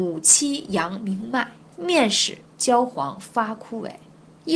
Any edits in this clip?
yes; 1 cut; at 1.7 s

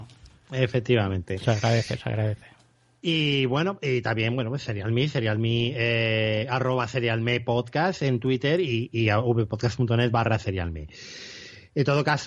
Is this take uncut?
yes; 0 cuts

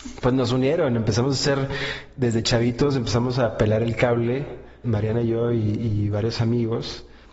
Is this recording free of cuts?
no; 1 cut; at 4.8 s

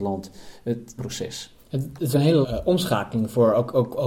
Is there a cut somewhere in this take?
yes; 3 cuts; at 1.0 s, 2.1 s, 2.4 s

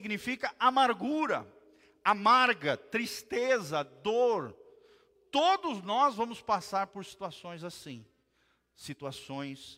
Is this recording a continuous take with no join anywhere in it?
yes; 0 cuts

